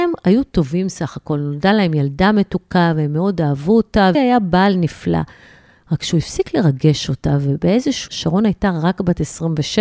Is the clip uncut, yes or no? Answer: no